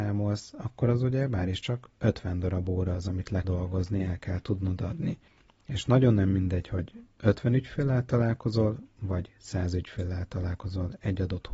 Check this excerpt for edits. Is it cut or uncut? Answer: cut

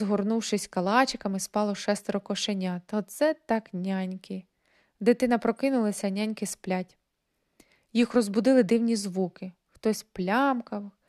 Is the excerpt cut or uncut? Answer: uncut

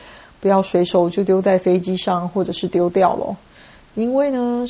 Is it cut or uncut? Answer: uncut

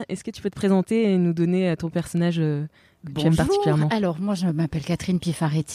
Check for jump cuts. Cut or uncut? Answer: uncut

